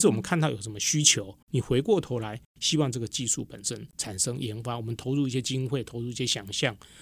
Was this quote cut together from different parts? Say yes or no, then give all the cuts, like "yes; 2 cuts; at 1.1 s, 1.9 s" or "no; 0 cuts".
yes; 2 cuts; at 1.4 s, 3.9 s